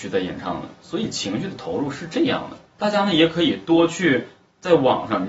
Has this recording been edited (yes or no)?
yes